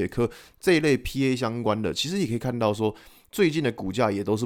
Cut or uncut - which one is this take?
uncut